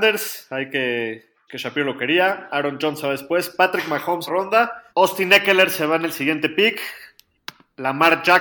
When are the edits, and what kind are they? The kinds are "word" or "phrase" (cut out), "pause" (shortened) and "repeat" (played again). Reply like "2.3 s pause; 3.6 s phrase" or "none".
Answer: 1.5 s word; 4.3 s phrase; 4.9 s pause